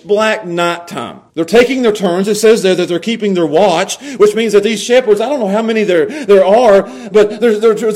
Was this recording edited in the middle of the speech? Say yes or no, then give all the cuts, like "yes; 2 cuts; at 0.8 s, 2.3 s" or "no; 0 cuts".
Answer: yes; 1 cut; at 1.3 s